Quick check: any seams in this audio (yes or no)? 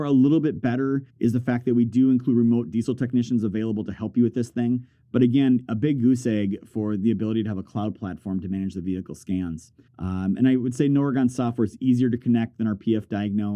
yes